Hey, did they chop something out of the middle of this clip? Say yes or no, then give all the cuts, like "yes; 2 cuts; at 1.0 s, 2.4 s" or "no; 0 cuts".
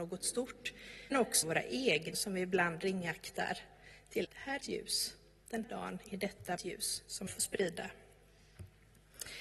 yes; 8 cuts; at 1.1 s, 1.4 s, 2.1 s, 4.2 s, 4.6 s, 5.6 s, 6.6 s, 7.3 s